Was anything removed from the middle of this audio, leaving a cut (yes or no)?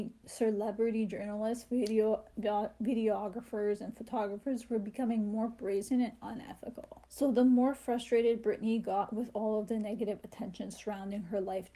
yes